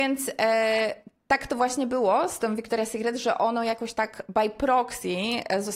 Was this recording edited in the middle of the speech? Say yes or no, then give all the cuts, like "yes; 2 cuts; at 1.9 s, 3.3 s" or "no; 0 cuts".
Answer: no; 0 cuts